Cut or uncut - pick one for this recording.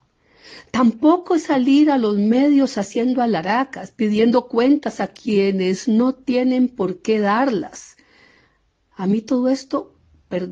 uncut